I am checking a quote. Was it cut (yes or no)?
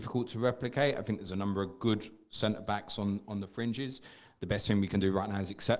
no